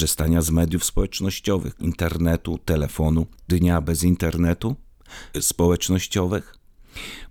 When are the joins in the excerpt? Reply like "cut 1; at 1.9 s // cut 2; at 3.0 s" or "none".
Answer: cut 1; at 1.8 s // cut 2; at 3.5 s // cut 3; at 5.3 s

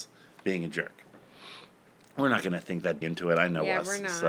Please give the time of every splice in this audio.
cut 1; at 1.8 s // cut 2; at 3.0 s

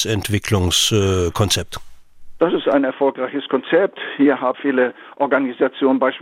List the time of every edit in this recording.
cut 1; at 4.5 s

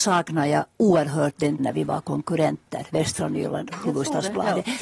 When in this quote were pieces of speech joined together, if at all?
cut 1; at 1.6 s // cut 2; at 3.7 s

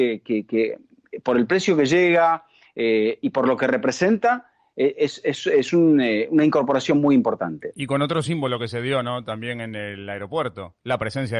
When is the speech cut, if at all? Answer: none

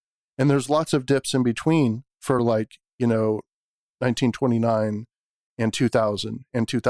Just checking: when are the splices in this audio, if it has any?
none

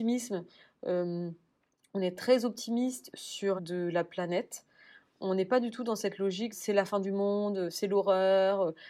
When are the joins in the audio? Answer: cut 1; at 3.6 s // cut 2; at 6.5 s

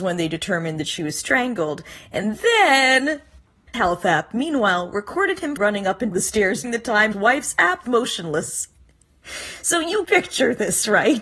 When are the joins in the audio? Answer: cut 1; at 3.7 s // cut 2; at 5.6 s // cut 3; at 6.1 s // cut 4; at 6.6 s // cut 5; at 7.1 s // cut 6; at 7.8 s // cut 7; at 10.0 s

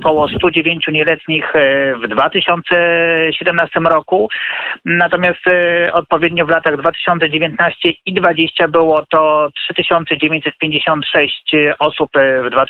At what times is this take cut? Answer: none

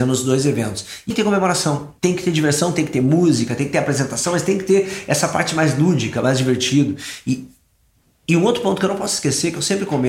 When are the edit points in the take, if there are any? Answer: cut 1; at 1.1 s // cut 2; at 2.0 s

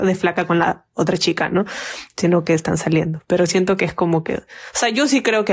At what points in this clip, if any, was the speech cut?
none

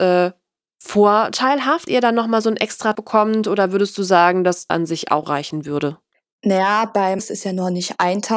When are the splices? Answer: cut 1; at 1.9 s // cut 2; at 2.9 s // cut 3; at 4.7 s // cut 4; at 5.2 s // cut 5; at 7.2 s

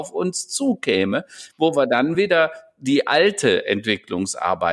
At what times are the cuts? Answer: none

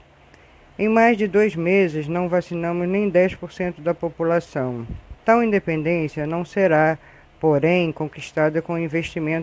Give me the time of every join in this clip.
cut 1; at 5.2 s

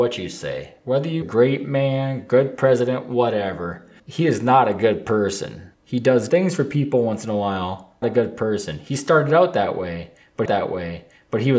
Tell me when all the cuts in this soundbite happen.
cut 1; at 1.2 s // cut 2; at 4.0 s // cut 3; at 5.7 s // cut 4; at 6.3 s // cut 5; at 8.0 s // cut 6; at 10.5 s

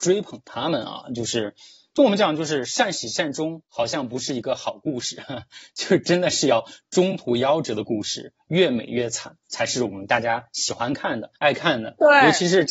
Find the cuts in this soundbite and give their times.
cut 1; at 3.7 s // cut 2; at 11.4 s

